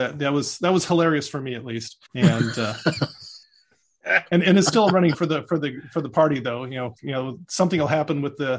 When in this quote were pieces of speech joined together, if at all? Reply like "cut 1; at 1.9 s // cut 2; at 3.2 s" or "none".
cut 1; at 2.1 s // cut 2; at 3.4 s // cut 3; at 5.1 s // cut 4; at 7.0 s

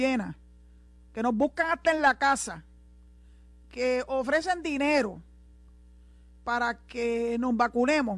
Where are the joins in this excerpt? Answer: none

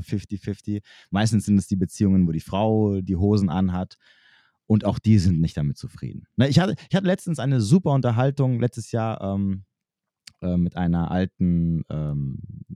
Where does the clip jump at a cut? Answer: none

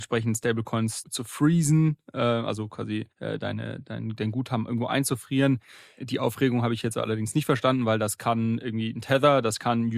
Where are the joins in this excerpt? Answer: cut 1; at 1.0 s // cut 2; at 3.1 s

